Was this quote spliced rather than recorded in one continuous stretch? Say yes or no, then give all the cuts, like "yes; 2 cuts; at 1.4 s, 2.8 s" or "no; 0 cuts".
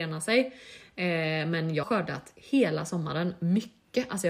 yes; 1 cut; at 1.8 s